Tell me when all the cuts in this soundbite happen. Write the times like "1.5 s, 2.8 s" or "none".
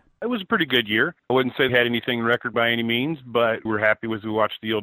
1.3 s, 1.7 s, 2.5 s, 3.7 s